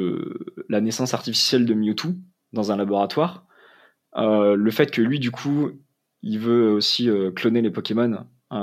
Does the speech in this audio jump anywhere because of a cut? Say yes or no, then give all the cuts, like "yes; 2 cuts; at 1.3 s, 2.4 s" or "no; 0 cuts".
no; 0 cuts